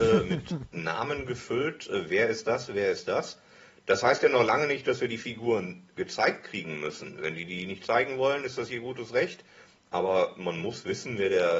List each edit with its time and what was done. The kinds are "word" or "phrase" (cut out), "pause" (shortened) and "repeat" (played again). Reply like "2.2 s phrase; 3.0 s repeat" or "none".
none